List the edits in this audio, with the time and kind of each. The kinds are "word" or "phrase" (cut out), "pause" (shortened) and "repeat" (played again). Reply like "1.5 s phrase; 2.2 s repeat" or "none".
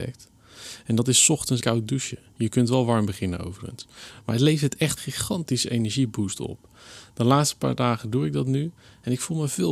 1.6 s word; 5.0 s word